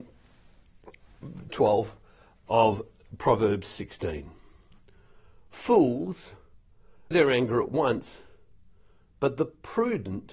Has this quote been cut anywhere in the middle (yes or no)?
yes